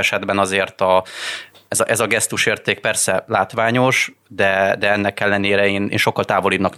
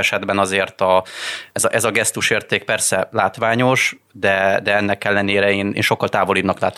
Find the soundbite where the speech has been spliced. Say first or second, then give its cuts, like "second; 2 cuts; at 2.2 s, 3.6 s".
second; 1 cut; at 1.5 s